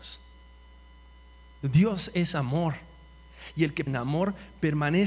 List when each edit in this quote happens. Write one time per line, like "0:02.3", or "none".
0:03.9